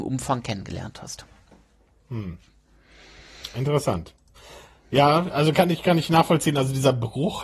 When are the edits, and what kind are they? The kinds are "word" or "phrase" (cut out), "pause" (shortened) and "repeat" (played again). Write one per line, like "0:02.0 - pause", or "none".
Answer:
none